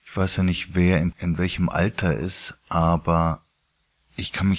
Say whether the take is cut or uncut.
cut